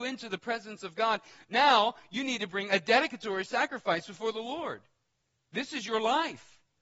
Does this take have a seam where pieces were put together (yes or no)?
no